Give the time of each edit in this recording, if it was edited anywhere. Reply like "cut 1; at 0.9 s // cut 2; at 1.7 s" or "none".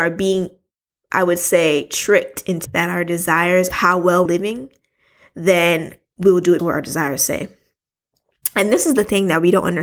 cut 1; at 2.6 s // cut 2; at 3.7 s // cut 3; at 4.3 s // cut 4; at 6.6 s